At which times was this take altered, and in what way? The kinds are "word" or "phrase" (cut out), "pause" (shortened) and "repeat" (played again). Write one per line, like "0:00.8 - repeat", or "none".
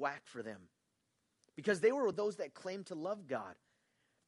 none